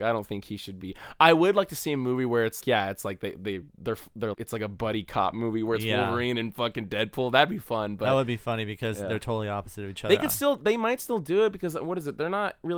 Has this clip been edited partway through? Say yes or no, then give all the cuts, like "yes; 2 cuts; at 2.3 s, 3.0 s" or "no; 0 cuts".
yes; 3 cuts; at 2.6 s, 3.7 s, 4.3 s